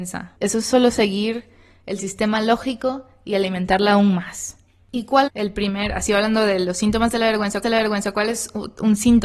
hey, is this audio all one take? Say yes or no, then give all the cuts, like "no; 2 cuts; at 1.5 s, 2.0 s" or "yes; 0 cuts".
no; 2 cuts; at 5.3 s, 7.6 s